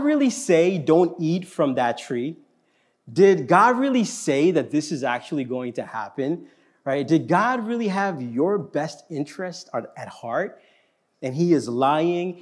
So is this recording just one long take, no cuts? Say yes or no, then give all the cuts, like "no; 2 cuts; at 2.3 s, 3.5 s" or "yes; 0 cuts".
yes; 0 cuts